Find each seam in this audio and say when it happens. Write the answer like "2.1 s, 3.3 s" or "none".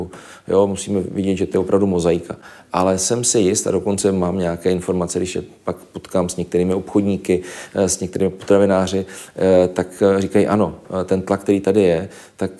none